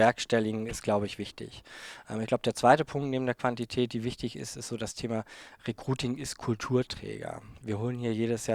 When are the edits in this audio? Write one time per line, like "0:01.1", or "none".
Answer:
none